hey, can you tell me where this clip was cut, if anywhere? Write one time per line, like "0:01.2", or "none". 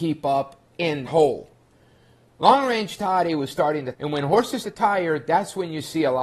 0:01.1
0:03.9
0:04.6